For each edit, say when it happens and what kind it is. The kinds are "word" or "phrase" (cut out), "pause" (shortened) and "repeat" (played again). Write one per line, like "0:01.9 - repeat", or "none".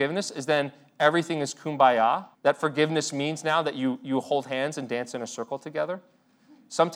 0:02.3 - pause